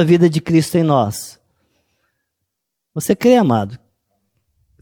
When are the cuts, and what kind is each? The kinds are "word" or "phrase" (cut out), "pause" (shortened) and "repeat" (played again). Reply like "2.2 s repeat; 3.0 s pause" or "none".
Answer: none